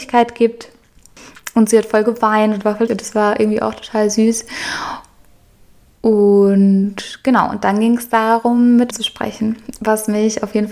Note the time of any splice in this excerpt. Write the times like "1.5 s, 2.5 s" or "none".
2.9 s, 8.9 s